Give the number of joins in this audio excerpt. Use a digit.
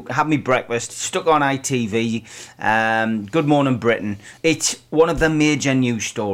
1